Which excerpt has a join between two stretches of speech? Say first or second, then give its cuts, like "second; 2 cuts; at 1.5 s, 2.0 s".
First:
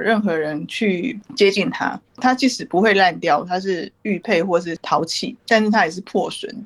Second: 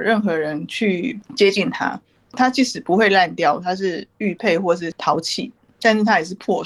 first; 2 cuts; at 2.1 s, 5.4 s